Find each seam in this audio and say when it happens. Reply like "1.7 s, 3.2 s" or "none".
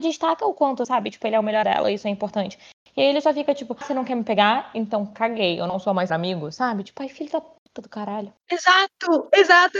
1.6 s, 3.8 s, 6.1 s